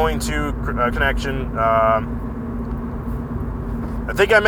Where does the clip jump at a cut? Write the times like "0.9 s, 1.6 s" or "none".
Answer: 0.9 s

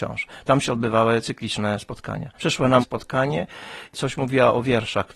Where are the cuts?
2.4 s, 2.8 s

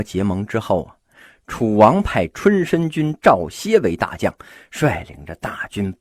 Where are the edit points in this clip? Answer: none

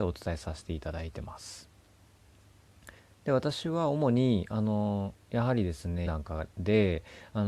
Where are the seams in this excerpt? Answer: 3.0 s, 6.1 s

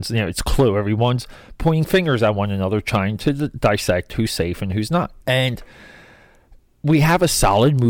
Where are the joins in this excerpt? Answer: 5.2 s

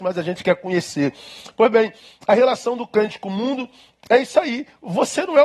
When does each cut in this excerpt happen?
none

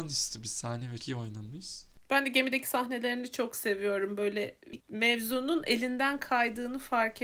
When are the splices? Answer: 1.0 s, 2.0 s, 4.8 s

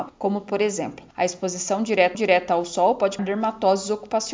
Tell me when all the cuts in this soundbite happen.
2.1 s, 3.2 s

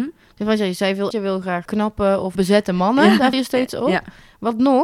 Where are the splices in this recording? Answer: 1.1 s, 1.7 s, 2.3 s, 3.3 s

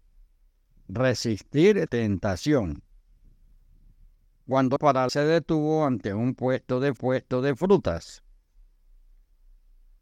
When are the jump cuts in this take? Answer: 1.9 s, 4.8 s, 5.1 s, 7.0 s

